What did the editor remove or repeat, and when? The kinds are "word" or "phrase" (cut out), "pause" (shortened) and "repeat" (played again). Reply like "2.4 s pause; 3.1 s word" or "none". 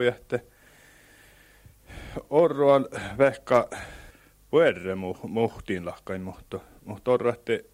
4.1 s pause